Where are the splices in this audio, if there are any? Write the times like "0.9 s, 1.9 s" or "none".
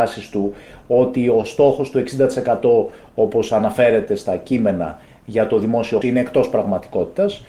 6.0 s